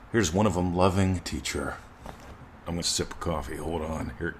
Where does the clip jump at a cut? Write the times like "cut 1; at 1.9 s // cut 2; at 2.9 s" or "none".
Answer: cut 1; at 1.2 s // cut 2; at 2.8 s